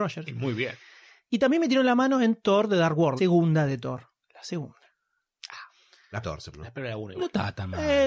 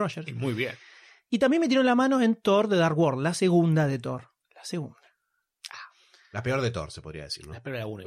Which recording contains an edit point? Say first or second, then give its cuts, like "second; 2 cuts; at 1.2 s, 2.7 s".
first; 3 cuts; at 3.2 s, 6.2 s, 6.5 s